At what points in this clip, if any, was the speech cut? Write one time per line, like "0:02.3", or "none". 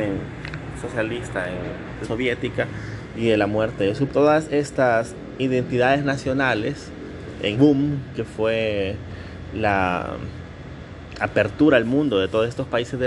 0:02.0
0:04.1
0:07.5